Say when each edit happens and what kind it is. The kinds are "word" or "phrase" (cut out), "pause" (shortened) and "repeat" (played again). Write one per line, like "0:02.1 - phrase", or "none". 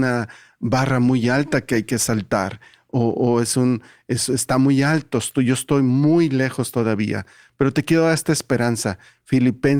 none